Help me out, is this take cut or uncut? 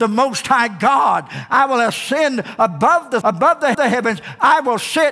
cut